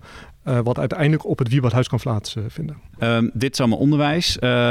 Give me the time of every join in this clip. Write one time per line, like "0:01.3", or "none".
0:02.9

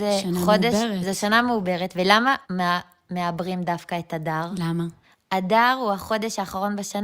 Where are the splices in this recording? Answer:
0:02.4
0:05.0

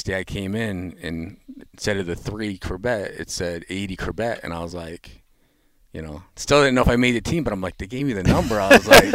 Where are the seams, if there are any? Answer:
none

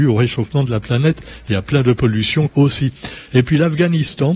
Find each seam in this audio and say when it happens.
0:02.5

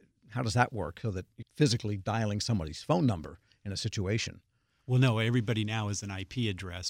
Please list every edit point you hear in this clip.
0:01.0
0:01.4

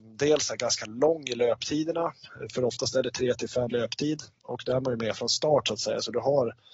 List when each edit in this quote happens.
0:03.7

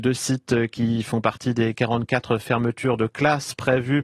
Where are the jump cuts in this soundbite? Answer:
none

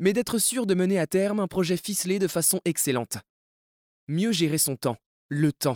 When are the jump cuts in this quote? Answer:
none

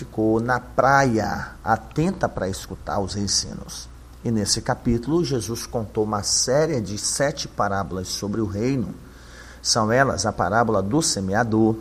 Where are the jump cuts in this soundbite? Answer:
none

